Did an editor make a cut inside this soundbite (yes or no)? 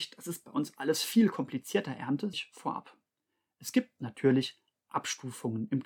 yes